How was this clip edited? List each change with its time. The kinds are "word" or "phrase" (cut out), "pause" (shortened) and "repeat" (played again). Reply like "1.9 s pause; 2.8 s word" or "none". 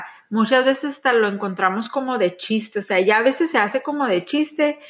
none